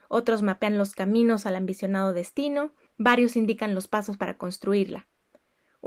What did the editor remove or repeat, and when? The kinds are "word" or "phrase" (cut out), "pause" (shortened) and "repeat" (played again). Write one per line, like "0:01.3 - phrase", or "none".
0:02.9 - pause